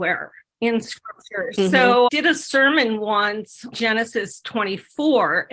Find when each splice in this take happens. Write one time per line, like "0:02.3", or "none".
0:02.1
0:03.7